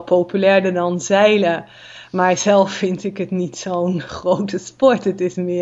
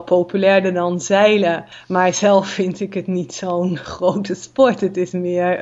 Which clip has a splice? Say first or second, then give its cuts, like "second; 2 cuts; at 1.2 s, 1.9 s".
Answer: second; 1 cut; at 1.7 s